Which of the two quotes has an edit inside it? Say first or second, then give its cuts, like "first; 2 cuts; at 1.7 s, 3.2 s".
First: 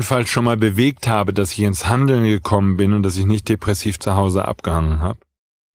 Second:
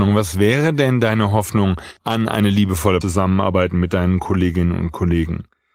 second; 2 cuts; at 2.0 s, 3.0 s